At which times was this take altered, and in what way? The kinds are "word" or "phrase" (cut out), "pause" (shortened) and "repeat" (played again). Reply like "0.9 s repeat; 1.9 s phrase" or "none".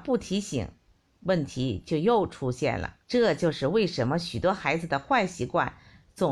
3.0 s pause